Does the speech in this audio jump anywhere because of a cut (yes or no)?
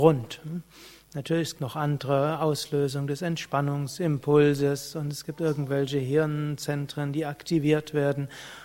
yes